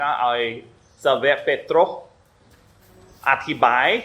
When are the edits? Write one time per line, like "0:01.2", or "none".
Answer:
none